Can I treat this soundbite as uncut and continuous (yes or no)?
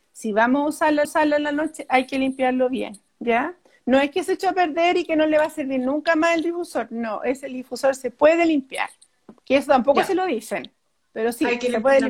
no